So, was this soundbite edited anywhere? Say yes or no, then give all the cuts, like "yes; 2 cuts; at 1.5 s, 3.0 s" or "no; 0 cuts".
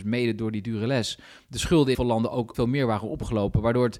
yes; 2 cuts; at 1.9 s, 2.5 s